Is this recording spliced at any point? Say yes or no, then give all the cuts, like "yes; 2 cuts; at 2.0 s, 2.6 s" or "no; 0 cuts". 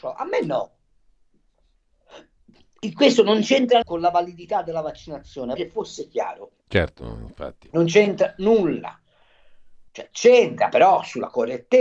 yes; 4 cuts; at 3.8 s, 5.6 s, 6.6 s, 9.9 s